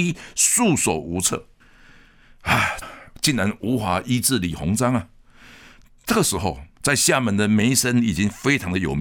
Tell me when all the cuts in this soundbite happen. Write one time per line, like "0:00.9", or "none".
0:02.8
0:06.7